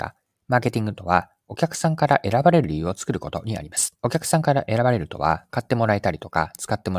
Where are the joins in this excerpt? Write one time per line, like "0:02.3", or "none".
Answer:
0:04.0